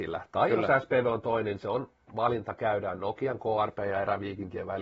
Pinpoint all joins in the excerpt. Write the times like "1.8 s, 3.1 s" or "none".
none